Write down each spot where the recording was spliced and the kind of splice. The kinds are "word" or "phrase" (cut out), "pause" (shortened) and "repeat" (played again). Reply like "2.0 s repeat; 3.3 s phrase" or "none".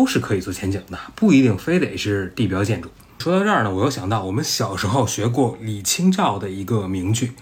none